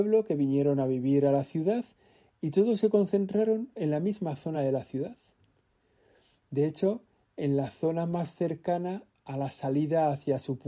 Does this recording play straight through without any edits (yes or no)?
yes